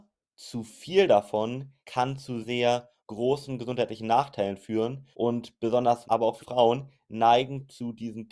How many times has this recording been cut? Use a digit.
6